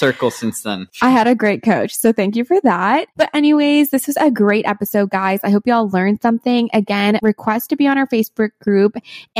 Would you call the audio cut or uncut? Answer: uncut